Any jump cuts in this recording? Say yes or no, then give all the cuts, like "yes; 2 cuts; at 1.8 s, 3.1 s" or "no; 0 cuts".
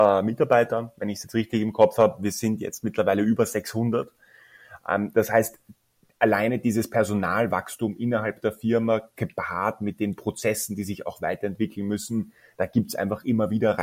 no; 0 cuts